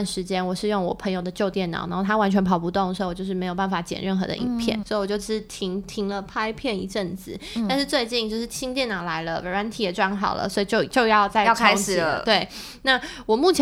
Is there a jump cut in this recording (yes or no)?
yes